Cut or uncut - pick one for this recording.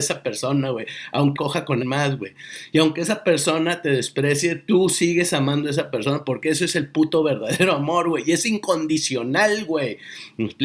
cut